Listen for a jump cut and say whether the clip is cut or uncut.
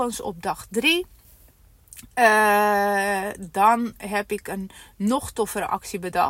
uncut